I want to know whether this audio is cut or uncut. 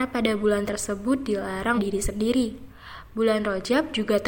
cut